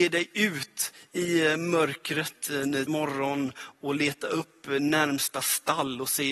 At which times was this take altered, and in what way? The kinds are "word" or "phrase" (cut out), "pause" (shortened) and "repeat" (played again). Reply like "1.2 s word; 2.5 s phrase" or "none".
2.9 s word